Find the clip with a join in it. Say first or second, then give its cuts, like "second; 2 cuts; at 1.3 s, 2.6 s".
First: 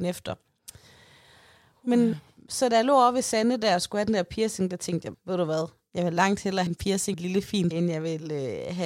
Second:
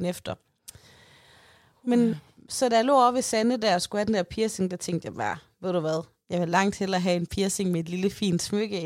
first; 4 cuts; at 5.1 s, 6.7 s, 7.1 s, 7.7 s